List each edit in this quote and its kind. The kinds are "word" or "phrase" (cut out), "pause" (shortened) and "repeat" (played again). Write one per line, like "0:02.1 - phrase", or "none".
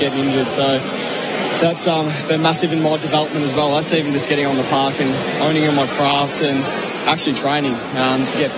none